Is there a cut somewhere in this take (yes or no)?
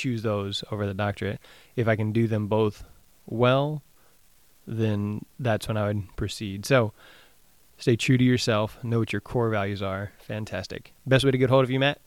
no